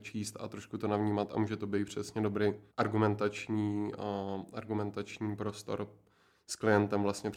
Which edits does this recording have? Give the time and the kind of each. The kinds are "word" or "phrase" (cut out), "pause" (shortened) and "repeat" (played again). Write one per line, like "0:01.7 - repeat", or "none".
0:02.7 - pause